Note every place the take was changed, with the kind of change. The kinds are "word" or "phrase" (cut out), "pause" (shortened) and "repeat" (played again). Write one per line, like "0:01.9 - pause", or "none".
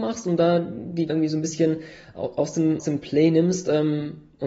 0:01.1 - word
0:02.8 - word

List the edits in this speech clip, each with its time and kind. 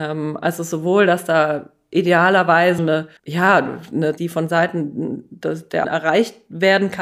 0:02.8 - word
0:03.2 - pause
0:04.2 - phrase
0:05.8 - word

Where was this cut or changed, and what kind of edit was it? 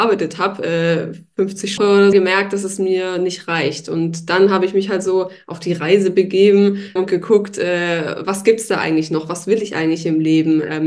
0:01.8 - phrase
0:02.1 - phrase
0:07.0 - word

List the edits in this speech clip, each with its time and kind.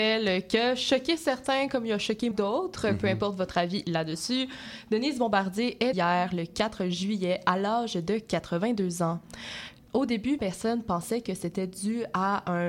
0:02.3 - word
0:05.9 - word
0:10.4 - word

